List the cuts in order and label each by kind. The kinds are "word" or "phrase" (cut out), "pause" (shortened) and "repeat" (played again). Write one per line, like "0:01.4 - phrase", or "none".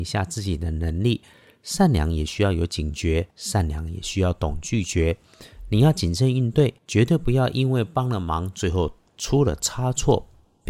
0:03.3 - pause
0:06.8 - pause